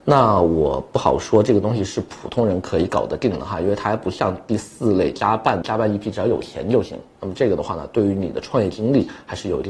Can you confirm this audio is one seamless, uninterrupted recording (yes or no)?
no